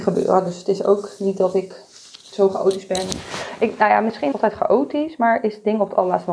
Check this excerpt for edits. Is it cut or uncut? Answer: cut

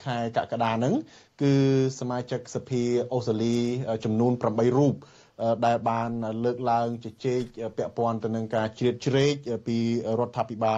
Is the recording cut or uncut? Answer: uncut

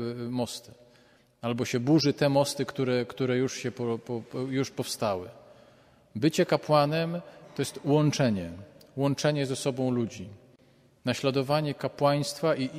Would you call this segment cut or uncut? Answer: uncut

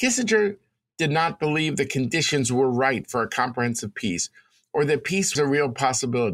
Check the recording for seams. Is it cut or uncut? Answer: cut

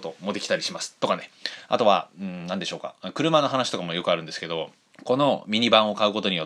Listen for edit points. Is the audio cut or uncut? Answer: cut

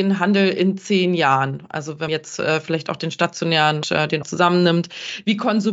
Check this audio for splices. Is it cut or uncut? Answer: cut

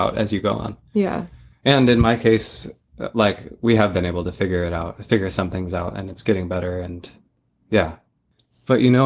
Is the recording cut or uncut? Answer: uncut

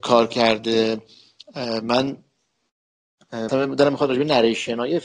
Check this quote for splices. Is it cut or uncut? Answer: cut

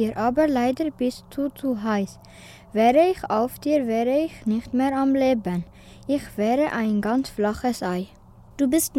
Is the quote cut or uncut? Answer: uncut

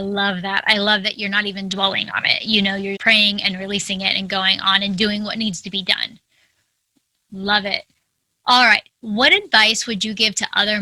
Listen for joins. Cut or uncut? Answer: cut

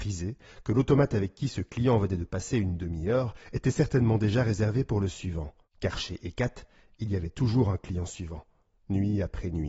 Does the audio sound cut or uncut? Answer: uncut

